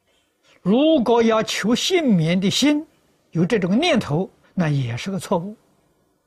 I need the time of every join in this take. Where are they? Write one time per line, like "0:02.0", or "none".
0:04.4